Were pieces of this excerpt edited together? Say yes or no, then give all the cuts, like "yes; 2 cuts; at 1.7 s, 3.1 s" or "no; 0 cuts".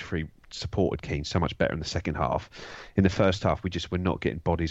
no; 0 cuts